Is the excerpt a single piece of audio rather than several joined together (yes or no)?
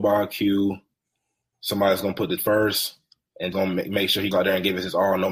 no